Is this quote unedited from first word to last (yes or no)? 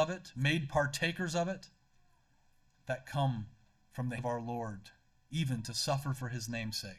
no